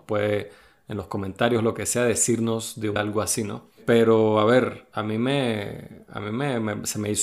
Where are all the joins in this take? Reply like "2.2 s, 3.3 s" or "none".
3.0 s